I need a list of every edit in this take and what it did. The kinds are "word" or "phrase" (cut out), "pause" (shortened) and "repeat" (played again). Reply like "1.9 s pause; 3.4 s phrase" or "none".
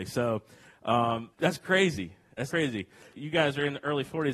1.3 s word; 2.5 s word; 3.1 s word